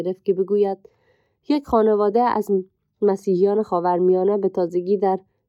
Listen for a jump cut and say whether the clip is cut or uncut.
uncut